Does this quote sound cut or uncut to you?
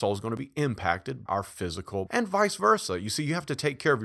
cut